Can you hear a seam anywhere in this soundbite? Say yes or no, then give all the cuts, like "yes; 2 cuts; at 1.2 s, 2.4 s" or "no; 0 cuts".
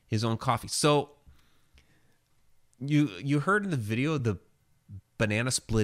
no; 0 cuts